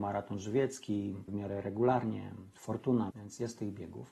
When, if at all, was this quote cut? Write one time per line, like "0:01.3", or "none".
0:01.3
0:03.1